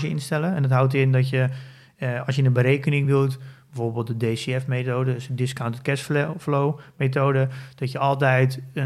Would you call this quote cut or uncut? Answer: uncut